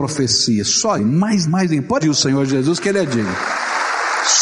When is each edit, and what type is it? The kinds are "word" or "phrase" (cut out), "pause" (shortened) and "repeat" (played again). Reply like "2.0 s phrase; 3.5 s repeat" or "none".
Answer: 1.0 s word; 1.5 s word; 2.0 s word

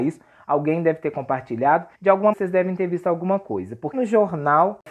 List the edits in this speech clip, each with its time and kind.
1.9 s pause; 2.3 s word; 3.9 s word

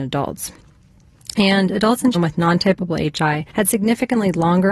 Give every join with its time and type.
2.1 s word; 3.5 s pause

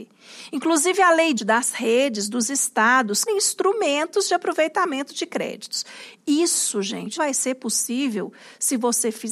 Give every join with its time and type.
1.4 s phrase; 3.3 s word; 7.2 s word

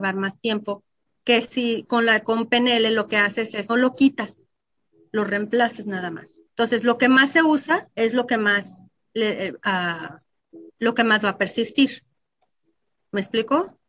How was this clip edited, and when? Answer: 1.0 s pause; 2.2 s word; 3.7 s word; 6.5 s pause; 7.9 s pause; 8.9 s pause; 10.7 s pause

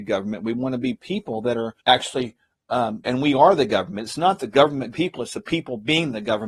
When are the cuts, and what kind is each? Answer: 1.8 s pause; 3.0 s phrase; 4.9 s word

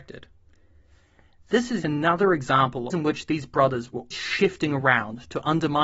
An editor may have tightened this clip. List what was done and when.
1.8 s word; 2.9 s phrase; 4.1 s word

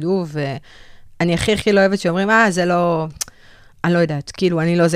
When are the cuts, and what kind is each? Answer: none

